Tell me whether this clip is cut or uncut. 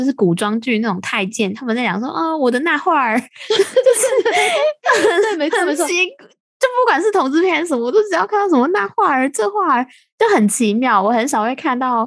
uncut